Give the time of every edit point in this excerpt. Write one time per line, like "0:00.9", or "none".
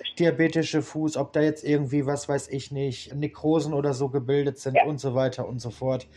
0:03.1